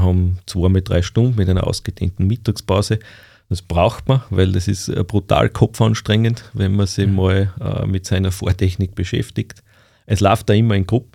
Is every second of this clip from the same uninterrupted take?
yes; 0 cuts

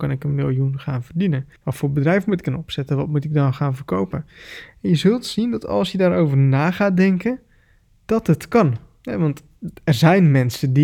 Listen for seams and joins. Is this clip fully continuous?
no; 1 cut; at 1.6 s

